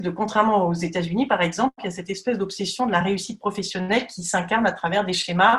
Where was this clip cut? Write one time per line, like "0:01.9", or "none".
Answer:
none